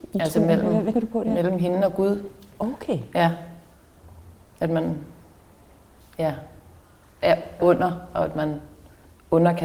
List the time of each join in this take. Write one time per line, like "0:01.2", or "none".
0:00.9
0:07.6